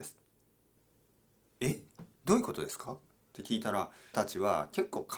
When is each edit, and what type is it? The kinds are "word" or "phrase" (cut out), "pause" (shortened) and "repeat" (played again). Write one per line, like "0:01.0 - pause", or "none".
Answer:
0:02.1 - pause
0:04.1 - word